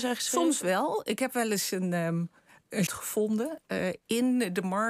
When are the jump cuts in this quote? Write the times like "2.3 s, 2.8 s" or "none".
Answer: 2.9 s